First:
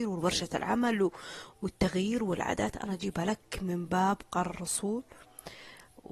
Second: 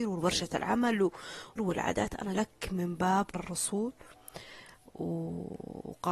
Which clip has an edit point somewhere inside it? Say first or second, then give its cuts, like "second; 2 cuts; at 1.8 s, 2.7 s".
second; 3 cuts; at 1.6 s, 2.3 s, 3.3 s